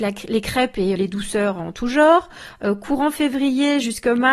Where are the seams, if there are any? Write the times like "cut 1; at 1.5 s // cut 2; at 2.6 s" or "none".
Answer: cut 1; at 0.9 s

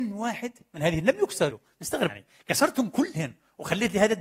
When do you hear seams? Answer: cut 1; at 1.0 s // cut 2; at 1.5 s // cut 3; at 2.1 s

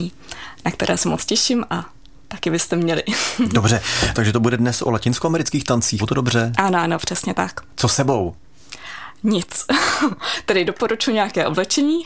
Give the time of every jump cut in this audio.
cut 1; at 4.1 s // cut 2; at 6.0 s

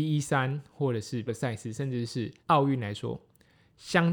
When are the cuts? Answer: cut 1; at 1.3 s // cut 2; at 2.4 s

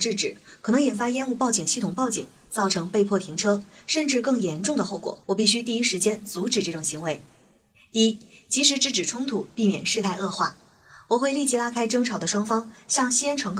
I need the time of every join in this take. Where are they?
cut 1; at 5.2 s

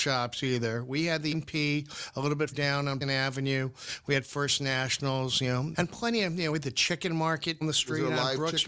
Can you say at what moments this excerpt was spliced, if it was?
cut 1; at 1.3 s // cut 2; at 2.5 s // cut 3; at 3.0 s // cut 4; at 5.7 s // cut 5; at 7.6 s

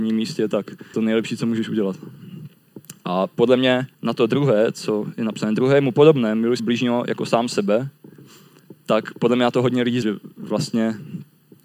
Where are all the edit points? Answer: cut 1; at 0.9 s // cut 2; at 3.9 s // cut 3; at 6.6 s // cut 4; at 10.0 s

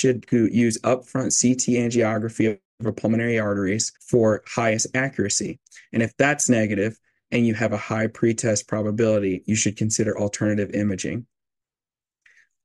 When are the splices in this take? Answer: cut 1; at 4.0 s

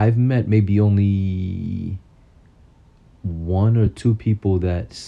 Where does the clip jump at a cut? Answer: none

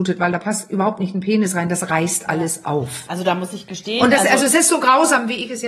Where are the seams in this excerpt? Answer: none

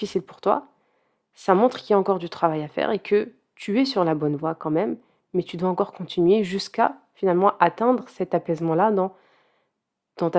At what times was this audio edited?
none

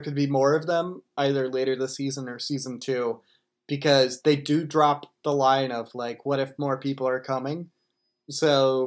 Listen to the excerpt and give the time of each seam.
none

